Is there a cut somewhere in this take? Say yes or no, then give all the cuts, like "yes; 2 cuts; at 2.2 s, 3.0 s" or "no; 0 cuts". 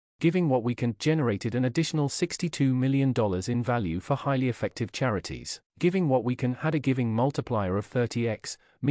yes; 1 cut; at 5.7 s